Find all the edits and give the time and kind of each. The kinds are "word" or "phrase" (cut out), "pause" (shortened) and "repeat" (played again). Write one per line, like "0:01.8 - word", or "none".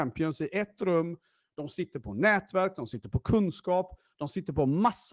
none